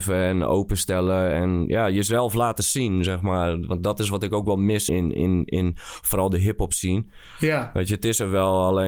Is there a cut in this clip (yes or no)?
yes